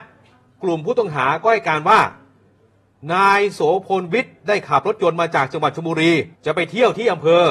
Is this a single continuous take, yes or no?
no